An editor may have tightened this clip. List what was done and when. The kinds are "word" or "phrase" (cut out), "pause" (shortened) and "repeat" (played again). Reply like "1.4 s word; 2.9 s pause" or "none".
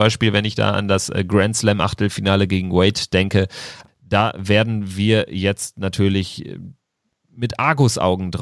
none